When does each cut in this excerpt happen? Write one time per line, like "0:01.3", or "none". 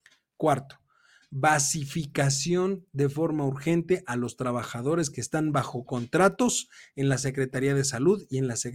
none